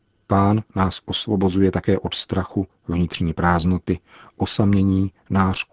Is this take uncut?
yes; 0 cuts

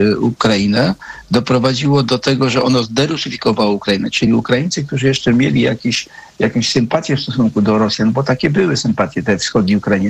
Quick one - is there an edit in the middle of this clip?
no; 0 cuts

